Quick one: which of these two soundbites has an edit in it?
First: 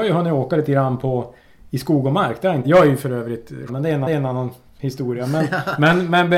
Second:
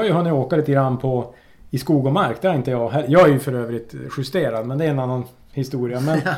first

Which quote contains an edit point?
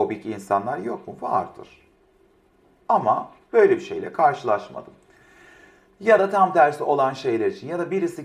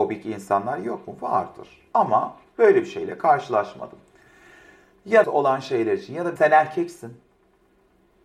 second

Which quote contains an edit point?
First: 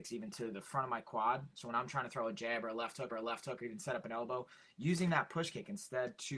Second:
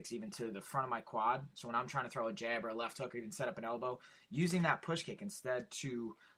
first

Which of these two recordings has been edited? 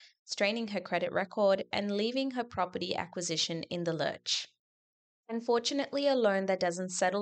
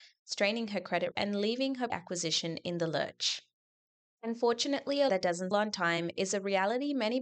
second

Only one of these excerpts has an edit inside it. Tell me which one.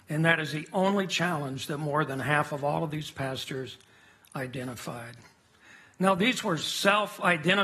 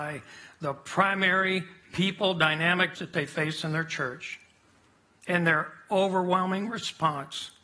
second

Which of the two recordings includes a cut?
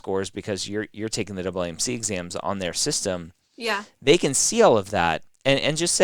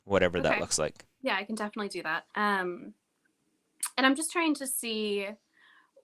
second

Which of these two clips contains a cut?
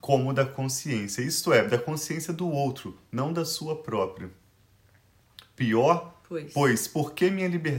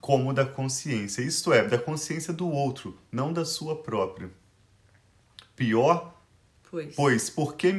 first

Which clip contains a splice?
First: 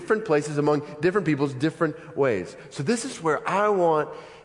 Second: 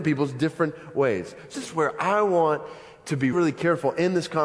second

